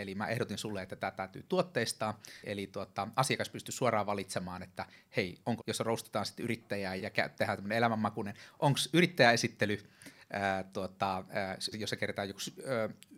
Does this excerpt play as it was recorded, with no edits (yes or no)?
no